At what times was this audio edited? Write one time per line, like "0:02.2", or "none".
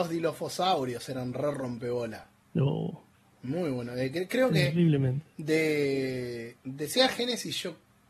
0:02.4
0:03.3
0:06.6